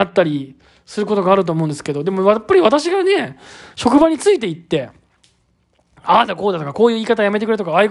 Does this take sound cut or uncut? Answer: uncut